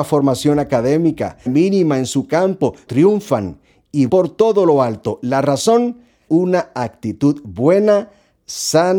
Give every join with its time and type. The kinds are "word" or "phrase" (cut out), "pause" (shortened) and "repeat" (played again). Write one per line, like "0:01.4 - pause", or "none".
0:01.5 - word
0:02.9 - word
0:04.1 - word
0:06.3 - word